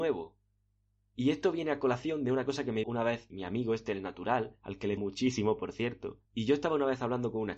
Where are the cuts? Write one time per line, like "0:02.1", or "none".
0:02.8
0:03.3
0:05.0
0:06.2